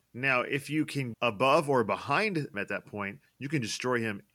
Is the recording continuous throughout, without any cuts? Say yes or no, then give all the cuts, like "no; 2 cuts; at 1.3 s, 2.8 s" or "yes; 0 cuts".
no; 2 cuts; at 1.1 s, 2.5 s